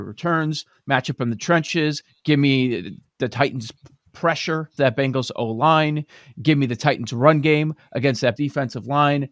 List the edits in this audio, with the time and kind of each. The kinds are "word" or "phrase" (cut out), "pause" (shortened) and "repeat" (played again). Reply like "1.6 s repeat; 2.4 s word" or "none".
4.8 s word; 8.4 s word

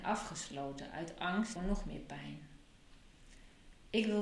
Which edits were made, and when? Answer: 1.6 s word

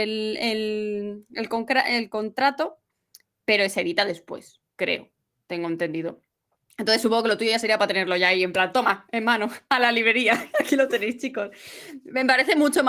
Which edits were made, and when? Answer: none

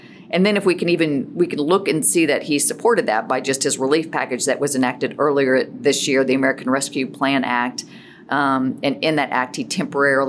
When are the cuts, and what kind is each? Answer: none

